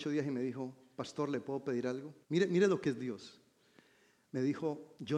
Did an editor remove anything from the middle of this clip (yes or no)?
yes